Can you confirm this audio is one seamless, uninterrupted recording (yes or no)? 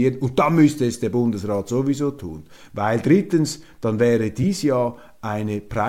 yes